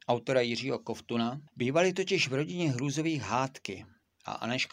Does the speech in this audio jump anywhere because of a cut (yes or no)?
yes